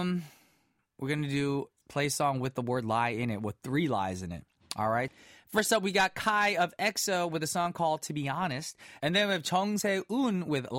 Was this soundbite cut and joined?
no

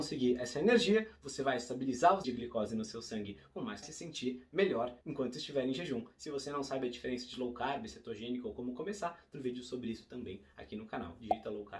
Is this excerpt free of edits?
no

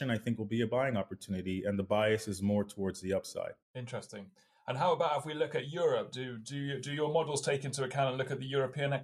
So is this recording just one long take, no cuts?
no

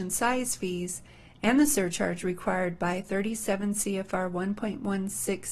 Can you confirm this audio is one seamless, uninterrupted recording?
yes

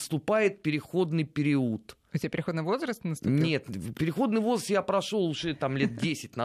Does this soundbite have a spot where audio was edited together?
no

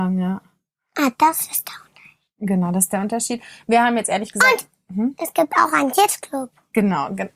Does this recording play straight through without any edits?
yes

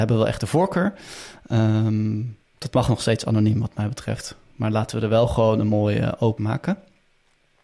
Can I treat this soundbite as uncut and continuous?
no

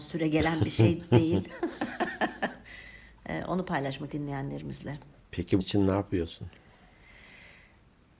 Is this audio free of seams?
no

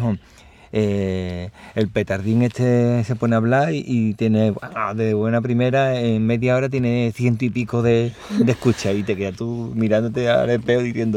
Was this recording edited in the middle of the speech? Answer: no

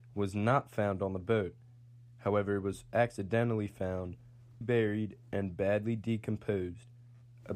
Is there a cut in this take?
yes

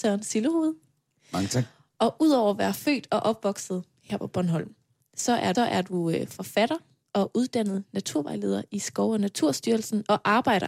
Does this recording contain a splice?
yes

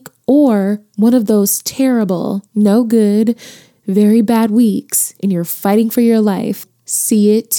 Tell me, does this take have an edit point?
no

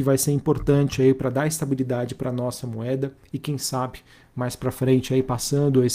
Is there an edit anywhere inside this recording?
no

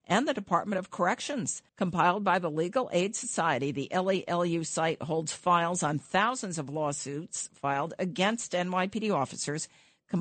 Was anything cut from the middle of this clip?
yes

